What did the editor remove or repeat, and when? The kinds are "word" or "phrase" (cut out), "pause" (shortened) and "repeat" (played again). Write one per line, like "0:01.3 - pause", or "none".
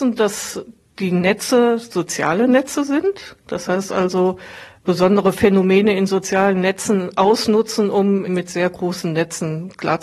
0:08.3 - word